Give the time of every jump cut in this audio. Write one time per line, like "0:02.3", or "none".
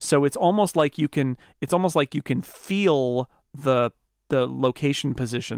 none